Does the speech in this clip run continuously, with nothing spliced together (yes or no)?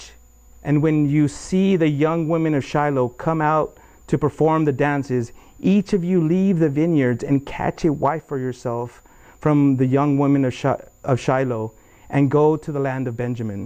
yes